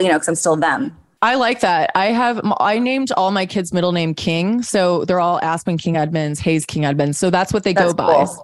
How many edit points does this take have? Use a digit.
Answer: 0